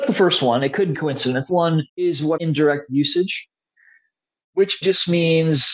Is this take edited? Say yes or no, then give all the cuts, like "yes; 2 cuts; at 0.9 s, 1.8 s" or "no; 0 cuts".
yes; 5 cuts; at 0.9 s, 1.5 s, 1.9 s, 2.4 s, 4.8 s